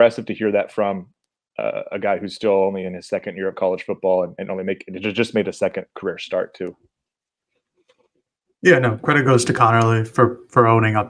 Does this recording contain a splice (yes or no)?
no